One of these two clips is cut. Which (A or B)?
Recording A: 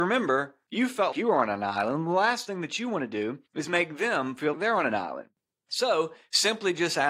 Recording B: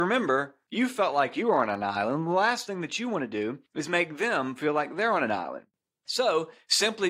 A